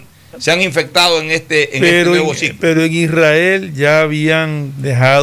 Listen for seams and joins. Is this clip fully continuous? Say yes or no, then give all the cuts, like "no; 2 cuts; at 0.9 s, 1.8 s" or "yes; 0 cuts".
yes; 0 cuts